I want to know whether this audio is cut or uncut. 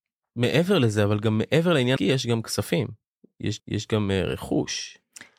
cut